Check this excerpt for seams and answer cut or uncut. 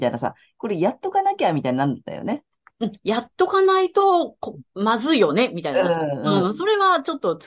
uncut